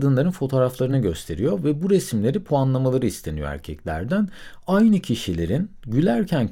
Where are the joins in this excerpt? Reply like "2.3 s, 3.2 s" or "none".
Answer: none